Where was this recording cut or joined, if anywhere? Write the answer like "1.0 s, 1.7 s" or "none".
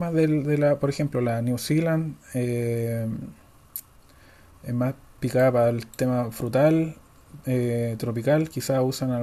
none